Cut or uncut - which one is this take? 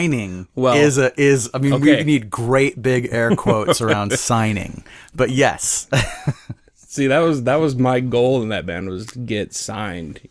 uncut